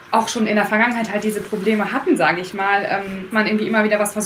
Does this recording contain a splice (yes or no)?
yes